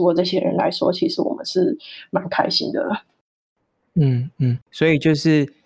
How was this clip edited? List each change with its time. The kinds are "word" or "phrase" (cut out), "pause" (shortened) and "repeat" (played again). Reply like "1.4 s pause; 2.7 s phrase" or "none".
none